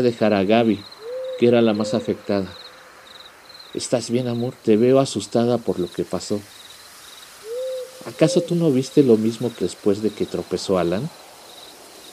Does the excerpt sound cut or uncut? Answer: cut